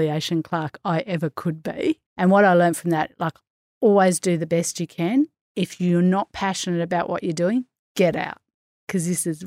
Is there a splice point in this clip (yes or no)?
yes